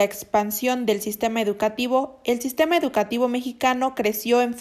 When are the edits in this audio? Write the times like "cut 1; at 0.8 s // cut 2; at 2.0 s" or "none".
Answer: none